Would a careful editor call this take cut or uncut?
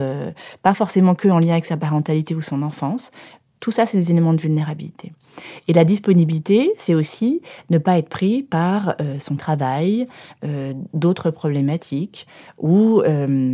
uncut